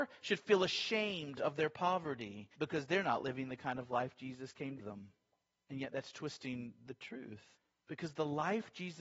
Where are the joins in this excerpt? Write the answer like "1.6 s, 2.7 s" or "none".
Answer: 2.5 s, 4.8 s, 5.3 s, 7.5 s